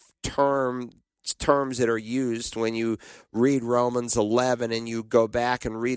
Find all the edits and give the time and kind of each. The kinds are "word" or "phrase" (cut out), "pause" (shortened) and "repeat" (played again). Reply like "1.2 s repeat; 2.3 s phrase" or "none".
none